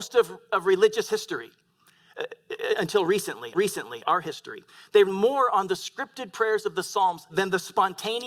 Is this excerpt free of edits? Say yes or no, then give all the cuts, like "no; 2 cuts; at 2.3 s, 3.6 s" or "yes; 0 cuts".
no; 3 cuts; at 3.5 s, 5.0 s, 7.3 s